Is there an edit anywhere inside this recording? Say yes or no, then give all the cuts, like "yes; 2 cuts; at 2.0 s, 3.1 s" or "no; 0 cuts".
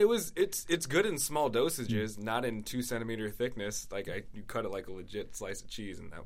no; 0 cuts